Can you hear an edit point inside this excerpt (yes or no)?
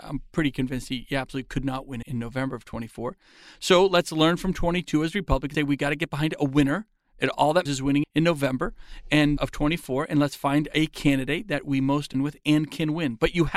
yes